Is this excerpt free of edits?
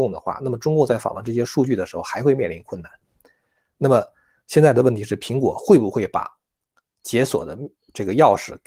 yes; 0 cuts

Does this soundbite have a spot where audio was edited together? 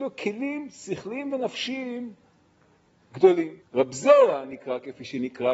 yes; 1 cut; at 3.6 s

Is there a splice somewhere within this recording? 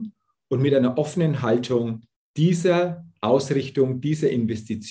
yes; 1 cut; at 2.1 s

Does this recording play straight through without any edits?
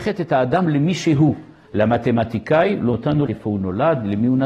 no; 2 cuts; at 2.9 s, 3.3 s

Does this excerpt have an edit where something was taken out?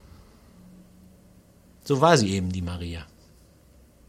no; 0 cuts

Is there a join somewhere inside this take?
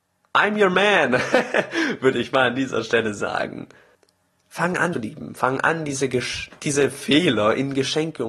yes; 2 cuts; at 3.9 s, 4.9 s

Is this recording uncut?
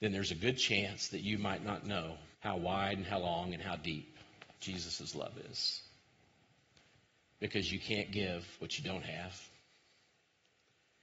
no; 2 cuts; at 2.3 s, 4.6 s

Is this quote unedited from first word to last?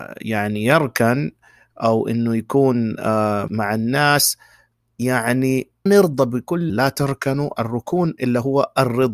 no; 3 cuts; at 3.5 s, 5.9 s, 6.7 s

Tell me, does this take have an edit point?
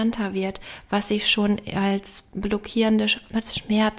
no; 0 cuts

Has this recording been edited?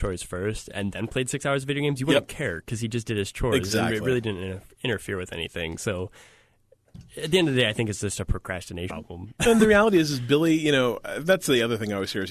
yes; 1 cut; at 8.9 s

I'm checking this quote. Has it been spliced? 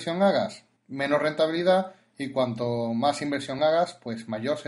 no; 0 cuts

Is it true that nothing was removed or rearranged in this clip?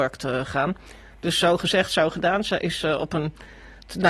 yes; 0 cuts

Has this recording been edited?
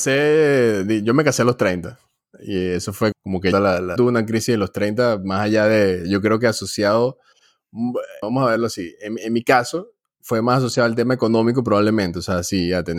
yes; 4 cuts; at 3.1 s, 3.5 s, 4.0 s, 8.2 s

